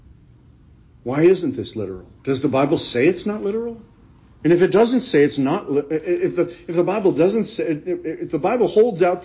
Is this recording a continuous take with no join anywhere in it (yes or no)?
no